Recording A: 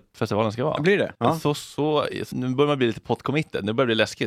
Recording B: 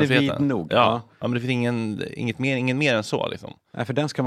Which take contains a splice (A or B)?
A